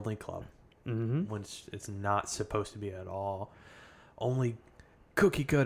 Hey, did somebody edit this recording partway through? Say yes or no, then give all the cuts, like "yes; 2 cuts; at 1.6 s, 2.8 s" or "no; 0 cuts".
no; 0 cuts